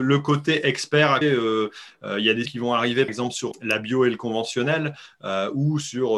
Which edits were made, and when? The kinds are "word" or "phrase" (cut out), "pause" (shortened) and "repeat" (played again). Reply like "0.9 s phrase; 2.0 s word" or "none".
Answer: 1.2 s word; 2.4 s word; 3.1 s word; 3.5 s word